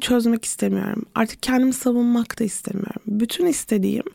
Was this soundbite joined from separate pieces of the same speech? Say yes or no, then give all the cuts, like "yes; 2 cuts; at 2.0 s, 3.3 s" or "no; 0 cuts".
no; 0 cuts